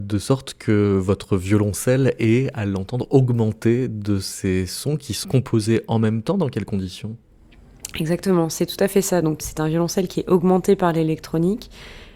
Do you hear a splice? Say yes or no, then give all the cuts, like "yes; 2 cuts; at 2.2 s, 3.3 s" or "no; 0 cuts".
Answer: yes; 2 cuts; at 5.2 s, 9.4 s